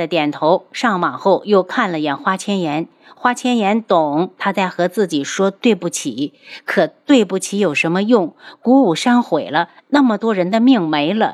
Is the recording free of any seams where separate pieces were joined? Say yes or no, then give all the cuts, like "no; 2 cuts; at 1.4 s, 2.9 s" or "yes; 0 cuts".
yes; 0 cuts